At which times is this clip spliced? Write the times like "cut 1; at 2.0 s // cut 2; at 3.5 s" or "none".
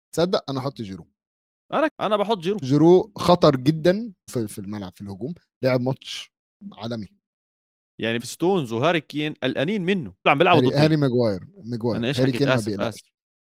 cut 1; at 1.9 s // cut 2; at 2.6 s // cut 3; at 4.3 s // cut 4; at 8.2 s // cut 5; at 10.3 s // cut 6; at 10.7 s